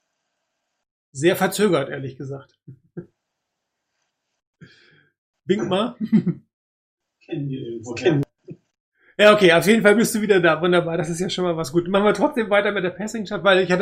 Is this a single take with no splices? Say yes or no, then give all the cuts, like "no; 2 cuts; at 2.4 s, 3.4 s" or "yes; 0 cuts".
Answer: yes; 0 cuts